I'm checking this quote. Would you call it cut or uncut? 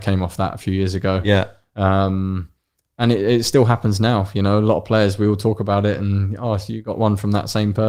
uncut